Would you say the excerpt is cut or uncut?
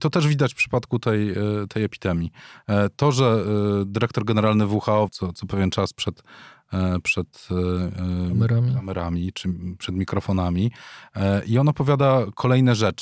cut